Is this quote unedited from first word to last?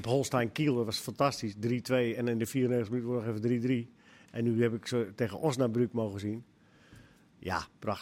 yes; 0 cuts

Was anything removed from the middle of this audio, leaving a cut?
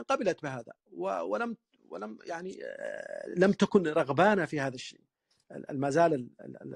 no; 0 cuts

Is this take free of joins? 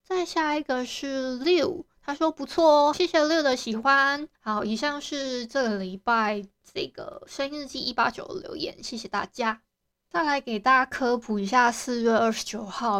no; 2 cuts; at 2.9 s, 4.3 s

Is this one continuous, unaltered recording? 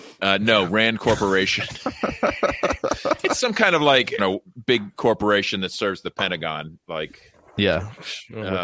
no; 1 cut; at 4.2 s

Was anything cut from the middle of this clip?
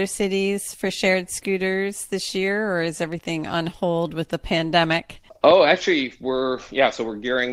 no; 0 cuts

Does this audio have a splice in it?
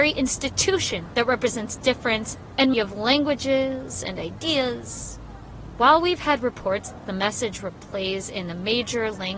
yes; 1 cut; at 2.7 s

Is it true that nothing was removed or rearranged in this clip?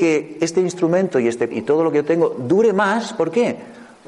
no; 1 cut; at 1.5 s

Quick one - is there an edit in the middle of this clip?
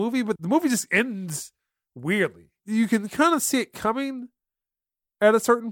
no; 0 cuts

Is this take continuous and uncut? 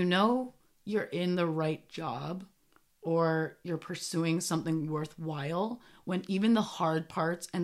yes; 0 cuts

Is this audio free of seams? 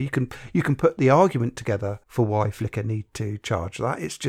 no; 1 cut; at 2.0 s

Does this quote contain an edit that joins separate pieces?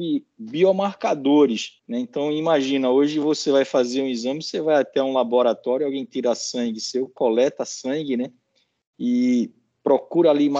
yes; 1 cut; at 1.8 s

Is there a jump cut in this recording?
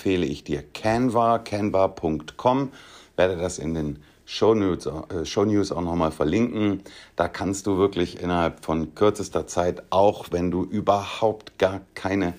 no; 0 cuts

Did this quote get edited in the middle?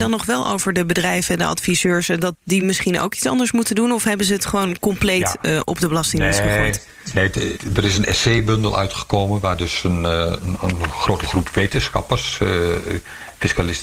no; 0 cuts

